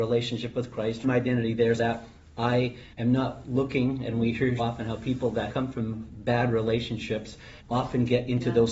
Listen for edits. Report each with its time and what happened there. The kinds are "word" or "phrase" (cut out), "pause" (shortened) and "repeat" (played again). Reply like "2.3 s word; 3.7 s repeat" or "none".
1.0 s word; 1.8 s word; 2.9 s pause; 4.6 s word; 5.5 s word; 7.6 s pause

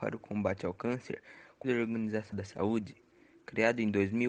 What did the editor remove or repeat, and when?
1.6 s word; 2.3 s word

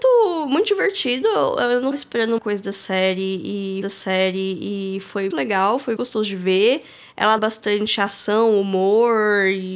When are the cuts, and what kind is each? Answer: 1.9 s word; 2.4 s word; 3.8 s repeat; 5.3 s word; 6.0 s word; 7.4 s word

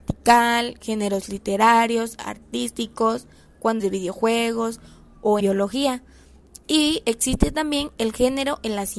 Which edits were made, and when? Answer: 3.8 s word; 5.4 s word

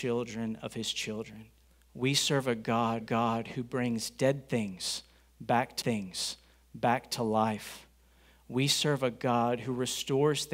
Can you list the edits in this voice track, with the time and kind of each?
1.6 s pause; 3.0 s repeat; 5.8 s repeat

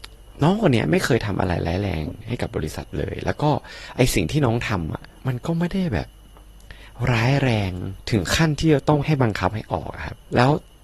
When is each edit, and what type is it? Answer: 5.1 s pause

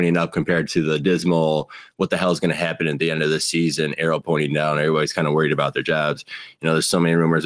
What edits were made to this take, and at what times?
none

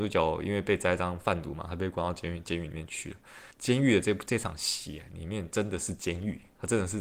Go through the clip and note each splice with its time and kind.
3.5 s pause

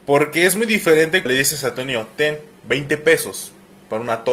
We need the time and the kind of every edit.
1.3 s word; 2.6 s pause

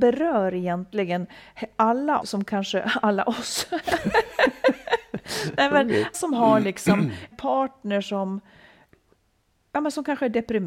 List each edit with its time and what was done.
2.2 s word; 6.1 s word; 7.3 s word

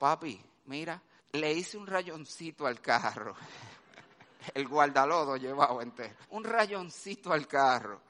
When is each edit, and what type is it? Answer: 1.2 s pause; 6.2 s pause

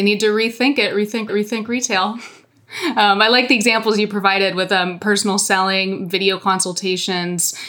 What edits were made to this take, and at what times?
1.3 s repeat

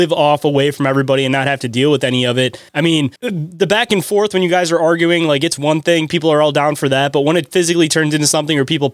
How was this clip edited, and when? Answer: 2.7 s pause; 3.2 s pause

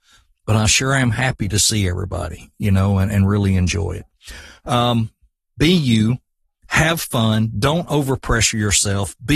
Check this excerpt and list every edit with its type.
none

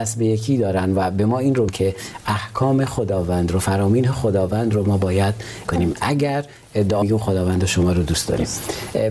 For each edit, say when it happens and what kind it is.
1.7 s word; 5.6 s word; 7.0 s word

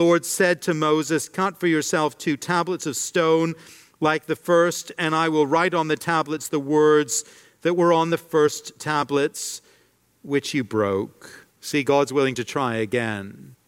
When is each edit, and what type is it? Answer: 11.5 s pause

